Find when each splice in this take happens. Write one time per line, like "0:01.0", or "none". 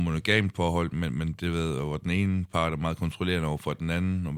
none